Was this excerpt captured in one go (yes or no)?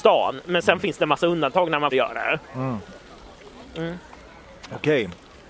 no